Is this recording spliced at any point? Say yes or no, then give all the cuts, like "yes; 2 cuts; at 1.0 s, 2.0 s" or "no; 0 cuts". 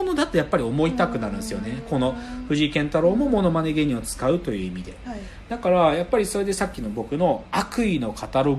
no; 0 cuts